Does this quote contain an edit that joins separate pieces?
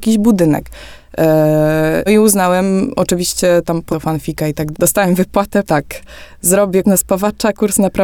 yes; 5 cuts; at 2.1 s, 3.9 s, 4.7 s, 5.7 s, 6.8 s

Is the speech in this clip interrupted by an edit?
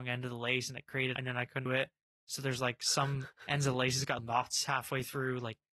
yes; 3 cuts; at 1.2 s, 1.7 s, 4.2 s

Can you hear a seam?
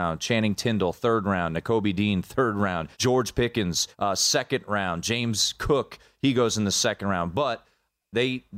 yes; 2 cuts; at 2.9 s, 3.9 s

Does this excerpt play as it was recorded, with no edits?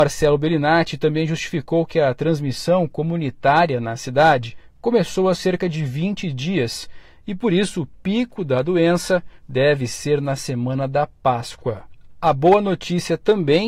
yes; 0 cuts

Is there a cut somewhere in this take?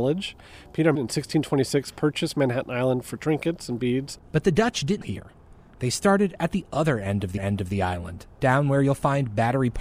yes; 4 cuts; at 1.0 s, 4.2 s, 5.0 s, 7.4 s

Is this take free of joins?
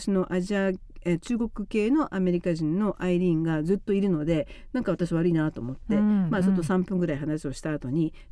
yes; 0 cuts

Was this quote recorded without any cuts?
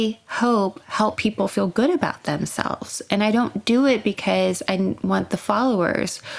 yes; 0 cuts

